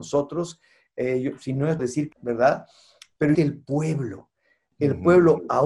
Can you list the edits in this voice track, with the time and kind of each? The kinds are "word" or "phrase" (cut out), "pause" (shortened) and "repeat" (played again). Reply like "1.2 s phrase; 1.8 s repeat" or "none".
1.8 s word; 2.1 s word; 3.3 s word